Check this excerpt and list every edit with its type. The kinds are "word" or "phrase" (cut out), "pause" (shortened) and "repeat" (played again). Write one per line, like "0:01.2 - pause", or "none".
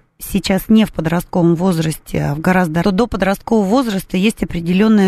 0:02.8 - phrase